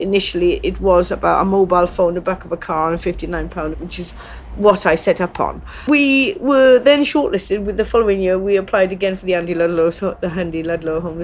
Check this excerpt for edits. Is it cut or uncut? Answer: cut